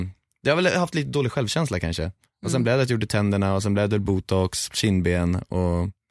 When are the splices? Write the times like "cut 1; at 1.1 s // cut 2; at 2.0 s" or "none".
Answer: none